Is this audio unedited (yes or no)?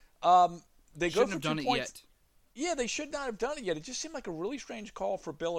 yes